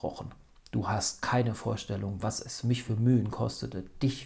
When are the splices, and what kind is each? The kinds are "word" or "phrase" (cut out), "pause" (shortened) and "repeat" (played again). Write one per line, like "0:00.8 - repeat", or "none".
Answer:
none